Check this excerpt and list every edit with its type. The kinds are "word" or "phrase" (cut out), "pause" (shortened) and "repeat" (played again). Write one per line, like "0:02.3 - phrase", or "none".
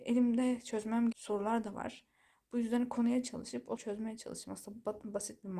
0:01.1 - word
0:03.8 - word